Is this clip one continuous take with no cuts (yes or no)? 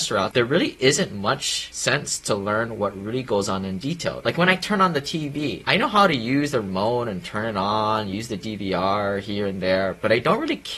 yes